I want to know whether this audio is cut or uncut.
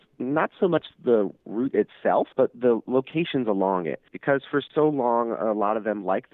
cut